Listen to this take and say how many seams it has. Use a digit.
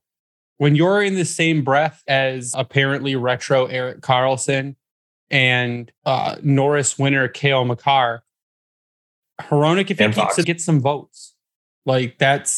4